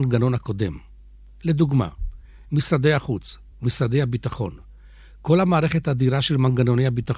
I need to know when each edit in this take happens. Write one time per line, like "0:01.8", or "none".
none